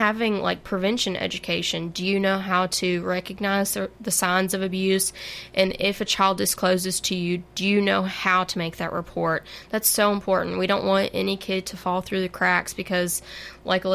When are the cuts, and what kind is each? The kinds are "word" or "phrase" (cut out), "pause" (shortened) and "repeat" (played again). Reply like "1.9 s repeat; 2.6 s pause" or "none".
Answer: none